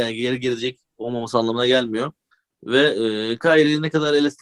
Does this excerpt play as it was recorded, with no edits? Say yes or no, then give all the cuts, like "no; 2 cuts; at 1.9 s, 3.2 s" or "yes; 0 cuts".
no; 1 cut; at 2.3 s